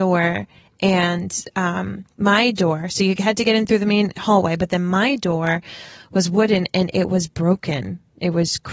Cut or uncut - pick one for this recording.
uncut